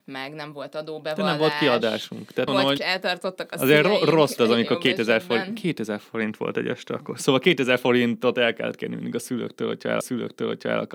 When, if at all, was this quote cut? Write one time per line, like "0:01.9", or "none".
0:02.5
0:02.8
0:04.4
0:10.0

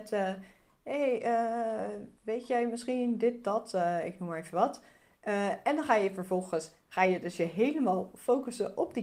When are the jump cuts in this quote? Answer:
0:02.2

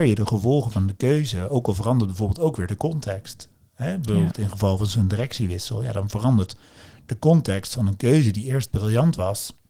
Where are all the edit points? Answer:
none

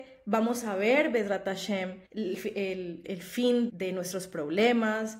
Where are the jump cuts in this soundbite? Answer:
0:02.1
0:03.0
0:03.7

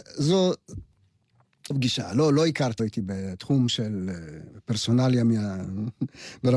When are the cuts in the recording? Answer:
0:01.7
0:02.8

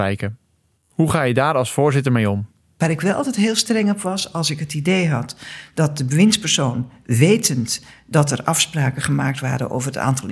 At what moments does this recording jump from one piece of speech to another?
none

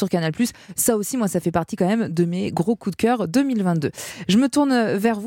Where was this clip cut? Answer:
none

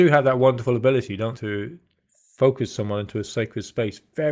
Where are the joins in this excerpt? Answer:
0:01.3

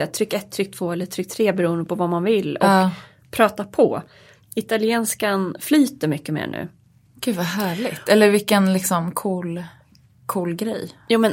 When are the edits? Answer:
none

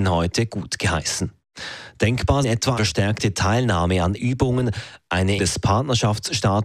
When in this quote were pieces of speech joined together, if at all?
0:02.4
0:02.8
0:04.2
0:05.4

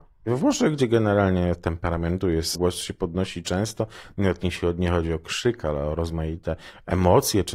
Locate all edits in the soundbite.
0:02.5

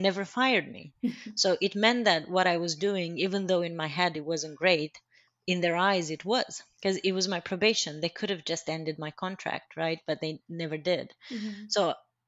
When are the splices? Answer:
none

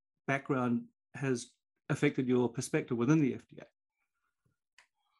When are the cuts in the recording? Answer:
none

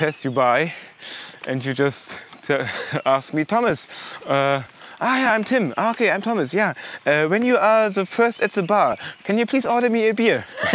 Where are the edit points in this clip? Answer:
none

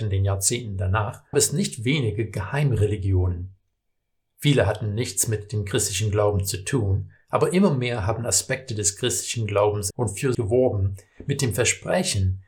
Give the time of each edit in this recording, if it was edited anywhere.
0:01.3
0:09.9
0:10.3

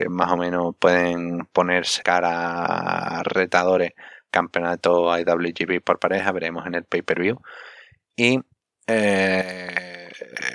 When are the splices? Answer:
0:02.0

